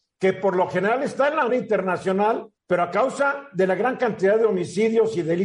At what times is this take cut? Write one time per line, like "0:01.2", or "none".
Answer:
0:01.5
0:02.6